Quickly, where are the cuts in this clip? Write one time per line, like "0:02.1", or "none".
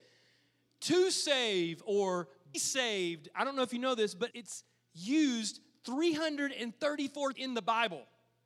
0:02.5
0:04.3
0:07.3